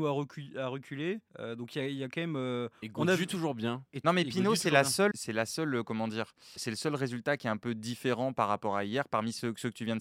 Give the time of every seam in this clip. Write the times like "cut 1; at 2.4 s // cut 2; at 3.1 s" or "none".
cut 1; at 1.3 s // cut 2; at 5.1 s // cut 3; at 6.6 s